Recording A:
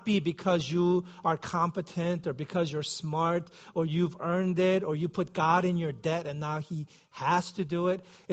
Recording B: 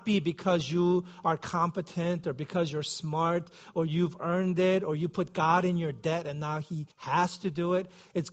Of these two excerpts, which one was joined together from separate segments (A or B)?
B